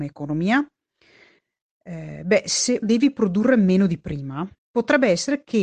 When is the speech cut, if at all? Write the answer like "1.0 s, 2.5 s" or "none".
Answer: 2.8 s, 4.6 s